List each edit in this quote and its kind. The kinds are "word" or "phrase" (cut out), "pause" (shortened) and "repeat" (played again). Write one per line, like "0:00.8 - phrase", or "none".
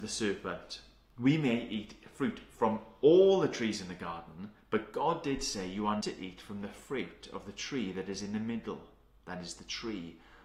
0:04.6 - pause
0:06.0 - word